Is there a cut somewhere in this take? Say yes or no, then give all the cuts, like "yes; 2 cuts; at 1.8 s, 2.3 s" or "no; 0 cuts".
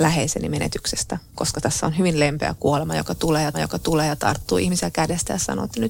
yes; 1 cut; at 3.5 s